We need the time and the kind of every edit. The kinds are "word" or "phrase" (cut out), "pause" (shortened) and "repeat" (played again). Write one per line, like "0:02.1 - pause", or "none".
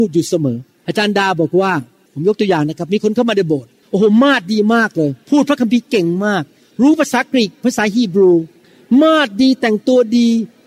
0:05.2 - pause

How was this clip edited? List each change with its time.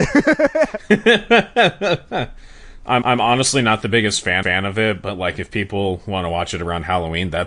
0:03.0 - repeat
0:04.4 - repeat

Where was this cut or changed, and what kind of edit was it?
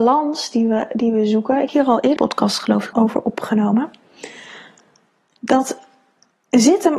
0:01.7 - word
0:02.2 - word
0:02.9 - word

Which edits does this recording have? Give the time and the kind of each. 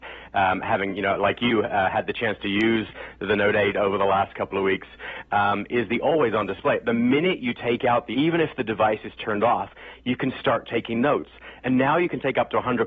0:08.1 - phrase

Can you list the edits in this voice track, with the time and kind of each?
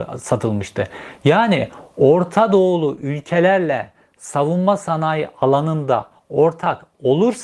none

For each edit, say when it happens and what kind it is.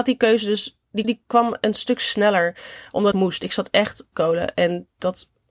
0:01.0 - word
0:03.1 - phrase
0:04.1 - phrase

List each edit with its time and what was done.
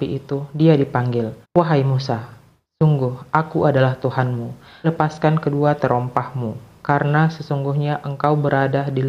0:01.4 - pause
0:04.8 - word

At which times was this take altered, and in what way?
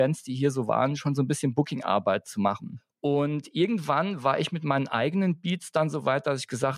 none

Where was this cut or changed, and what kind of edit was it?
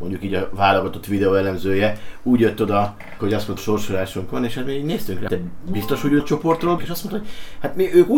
0:03.2 - word
0:03.6 - phrase
0:05.3 - word
0:06.2 - word
0:06.8 - word

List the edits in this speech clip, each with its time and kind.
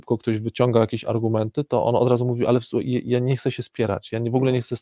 none

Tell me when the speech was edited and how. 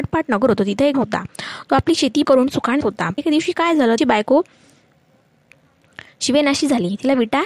0:00.9 - word
0:02.2 - word
0:02.8 - word
0:03.2 - word
0:04.0 - word

